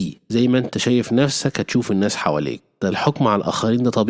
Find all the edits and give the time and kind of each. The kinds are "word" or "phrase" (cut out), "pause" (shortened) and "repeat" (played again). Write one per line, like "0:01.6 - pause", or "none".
0:02.9 - word